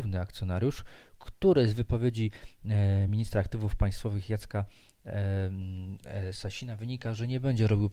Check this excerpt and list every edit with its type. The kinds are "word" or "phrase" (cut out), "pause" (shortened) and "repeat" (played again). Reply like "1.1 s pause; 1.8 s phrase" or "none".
none